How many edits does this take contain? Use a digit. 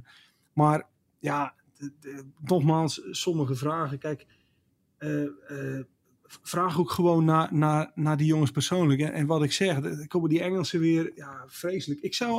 0